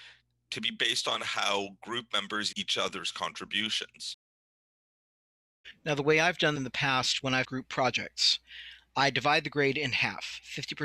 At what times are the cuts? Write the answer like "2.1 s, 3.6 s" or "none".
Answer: 2.5 s, 6.6 s, 7.4 s